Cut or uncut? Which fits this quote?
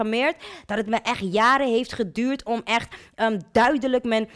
uncut